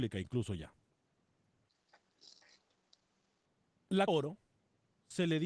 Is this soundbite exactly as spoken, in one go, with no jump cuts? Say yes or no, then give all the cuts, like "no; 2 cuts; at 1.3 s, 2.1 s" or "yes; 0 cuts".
no; 1 cut; at 4.1 s